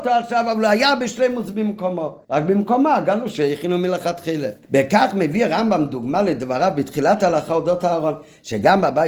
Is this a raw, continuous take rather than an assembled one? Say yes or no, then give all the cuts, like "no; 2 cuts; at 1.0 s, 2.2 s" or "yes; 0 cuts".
no; 2 cuts; at 2.2 s, 4.6 s